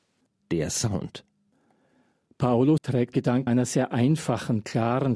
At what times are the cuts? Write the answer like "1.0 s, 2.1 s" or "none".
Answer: 2.8 s, 3.1 s, 3.5 s